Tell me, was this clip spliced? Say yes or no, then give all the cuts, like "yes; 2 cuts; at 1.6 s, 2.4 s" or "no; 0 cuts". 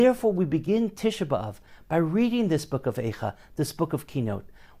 no; 0 cuts